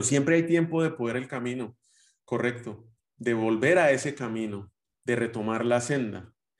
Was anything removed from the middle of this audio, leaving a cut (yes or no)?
yes